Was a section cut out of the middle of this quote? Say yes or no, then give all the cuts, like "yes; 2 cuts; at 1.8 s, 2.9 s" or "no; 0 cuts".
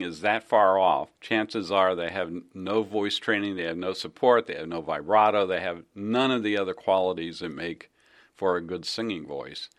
yes; 1 cut; at 1.2 s